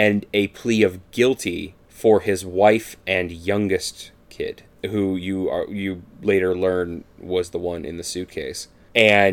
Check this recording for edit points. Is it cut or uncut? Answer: uncut